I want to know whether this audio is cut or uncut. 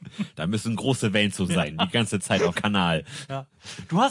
cut